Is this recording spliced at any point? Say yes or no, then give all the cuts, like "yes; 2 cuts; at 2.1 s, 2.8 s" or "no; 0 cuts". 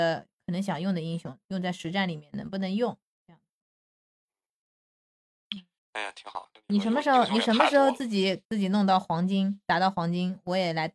yes; 2 cuts; at 5.8 s, 8.4 s